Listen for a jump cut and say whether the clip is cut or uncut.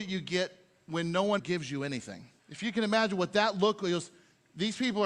cut